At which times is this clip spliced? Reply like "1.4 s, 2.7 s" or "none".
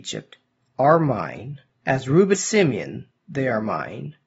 2.3 s

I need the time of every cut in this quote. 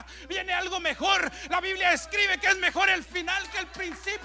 none

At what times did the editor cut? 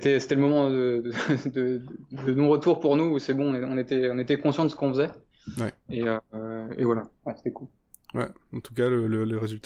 none

